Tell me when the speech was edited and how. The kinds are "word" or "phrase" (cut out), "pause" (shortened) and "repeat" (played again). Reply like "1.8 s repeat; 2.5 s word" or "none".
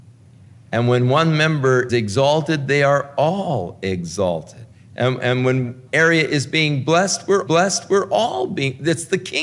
1.9 s word; 4.7 s pause; 5.9 s word; 7.5 s repeat